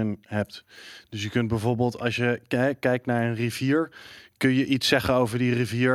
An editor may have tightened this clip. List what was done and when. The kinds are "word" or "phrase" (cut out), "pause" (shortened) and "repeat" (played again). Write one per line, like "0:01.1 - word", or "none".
none